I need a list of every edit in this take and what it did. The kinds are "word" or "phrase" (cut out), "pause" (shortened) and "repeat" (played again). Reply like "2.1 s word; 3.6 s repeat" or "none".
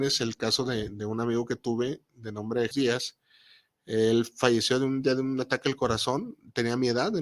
2.7 s word